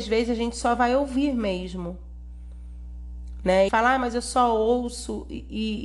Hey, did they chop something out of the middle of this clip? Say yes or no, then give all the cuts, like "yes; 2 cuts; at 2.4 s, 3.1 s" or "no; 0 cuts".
yes; 1 cut; at 3.7 s